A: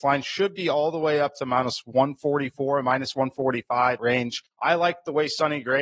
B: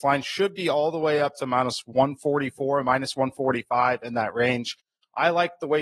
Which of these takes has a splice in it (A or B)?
A